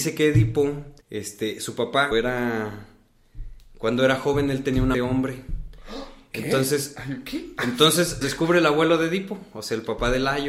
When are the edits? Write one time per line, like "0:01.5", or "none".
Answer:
0:01.0
0:02.1
0:04.9
0:08.2